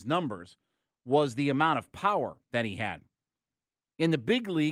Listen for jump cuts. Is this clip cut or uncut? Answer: uncut